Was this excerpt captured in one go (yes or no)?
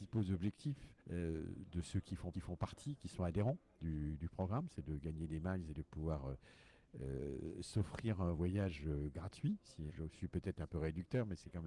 no